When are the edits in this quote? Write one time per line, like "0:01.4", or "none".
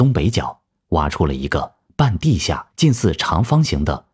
0:02.7